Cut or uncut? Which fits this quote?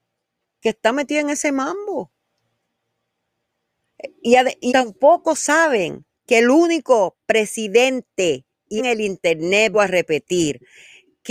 cut